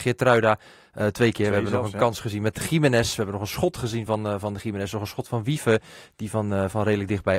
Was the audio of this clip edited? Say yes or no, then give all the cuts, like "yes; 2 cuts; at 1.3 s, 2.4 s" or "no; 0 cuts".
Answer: no; 0 cuts